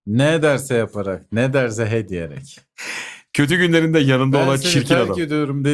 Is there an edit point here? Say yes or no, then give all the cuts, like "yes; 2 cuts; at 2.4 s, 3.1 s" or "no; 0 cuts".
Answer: no; 0 cuts